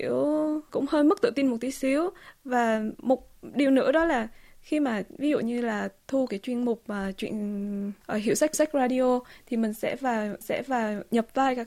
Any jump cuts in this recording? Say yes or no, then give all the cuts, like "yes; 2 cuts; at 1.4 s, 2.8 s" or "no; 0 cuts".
yes; 2 cuts; at 8.5 s, 10.4 s